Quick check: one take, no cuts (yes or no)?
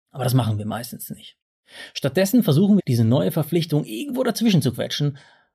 no